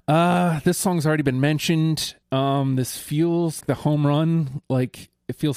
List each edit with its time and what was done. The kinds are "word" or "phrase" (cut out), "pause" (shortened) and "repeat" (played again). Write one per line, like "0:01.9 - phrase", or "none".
0:02.2 - pause
0:03.6 - word

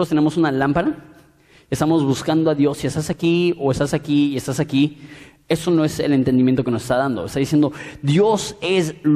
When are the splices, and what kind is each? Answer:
none

